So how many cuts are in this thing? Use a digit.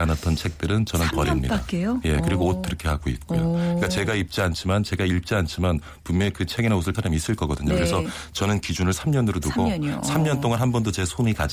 2